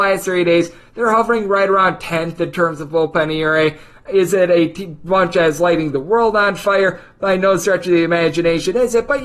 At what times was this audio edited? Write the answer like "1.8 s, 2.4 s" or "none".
none